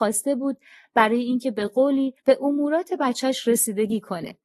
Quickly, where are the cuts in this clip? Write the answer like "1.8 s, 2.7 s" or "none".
2.2 s